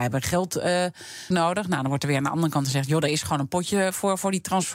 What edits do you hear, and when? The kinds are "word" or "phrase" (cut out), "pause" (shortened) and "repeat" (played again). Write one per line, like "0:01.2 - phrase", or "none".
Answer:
0:01.3 - word